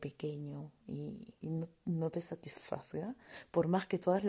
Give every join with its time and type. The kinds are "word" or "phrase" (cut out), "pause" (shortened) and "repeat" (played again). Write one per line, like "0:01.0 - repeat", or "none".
0:01.4 - pause

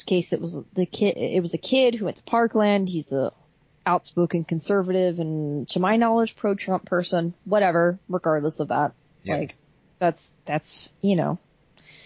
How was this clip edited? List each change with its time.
none

